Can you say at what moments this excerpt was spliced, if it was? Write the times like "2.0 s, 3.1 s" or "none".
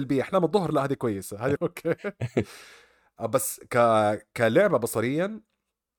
1.6 s